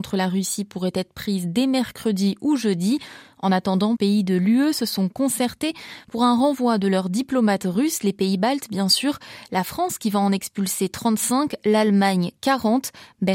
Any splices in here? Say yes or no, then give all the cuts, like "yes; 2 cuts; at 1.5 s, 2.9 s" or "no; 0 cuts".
yes; 1 cut; at 4.0 s